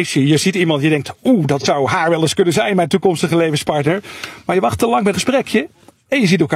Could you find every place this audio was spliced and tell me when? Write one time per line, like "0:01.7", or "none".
0:05.1